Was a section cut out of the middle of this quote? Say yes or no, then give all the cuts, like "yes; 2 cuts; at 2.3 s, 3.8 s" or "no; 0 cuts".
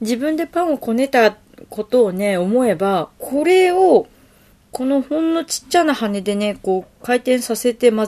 no; 0 cuts